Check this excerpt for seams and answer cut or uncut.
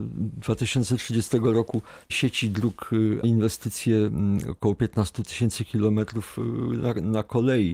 cut